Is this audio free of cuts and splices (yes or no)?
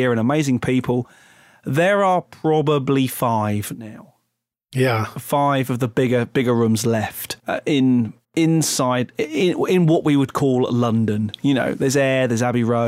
no